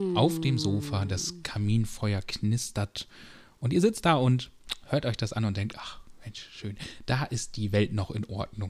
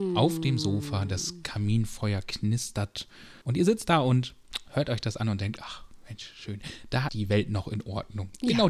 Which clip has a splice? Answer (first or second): second